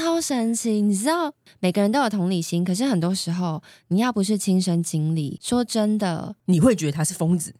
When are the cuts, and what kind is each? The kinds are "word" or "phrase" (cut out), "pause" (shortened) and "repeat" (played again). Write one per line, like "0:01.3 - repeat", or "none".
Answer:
none